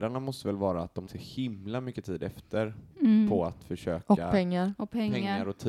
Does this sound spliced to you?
yes; 1 cut; at 1.1 s

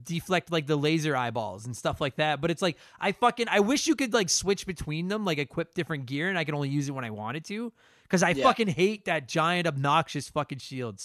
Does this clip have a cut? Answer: no; 0 cuts

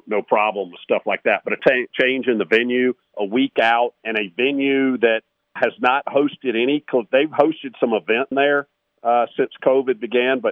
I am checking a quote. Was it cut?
yes; 5 cuts; at 1.6 s, 3.1 s, 4.0 s, 5.6 s, 8.3 s

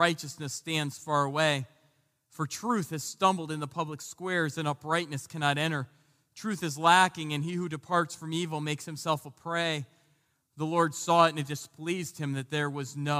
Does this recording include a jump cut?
no; 0 cuts

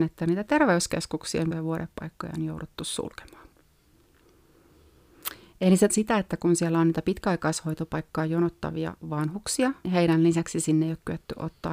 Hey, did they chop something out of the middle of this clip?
yes; 3 cuts; at 1.5 s, 5.9 s, 9.8 s

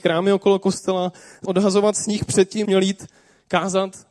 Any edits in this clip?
yes; 2 cuts; at 1.4 s, 2.6 s

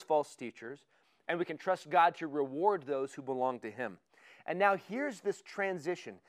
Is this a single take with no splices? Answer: yes; 0 cuts

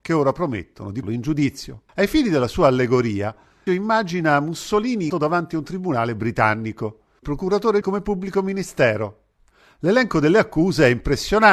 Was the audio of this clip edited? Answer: yes; 6 cuts; at 1.0 s, 1.9 s, 3.7 s, 5.1 s, 7.2 s, 7.8 s

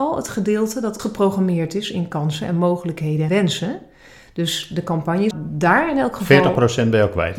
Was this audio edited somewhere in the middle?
yes; 3 cuts; at 1.0 s, 3.3 s, 5.3 s

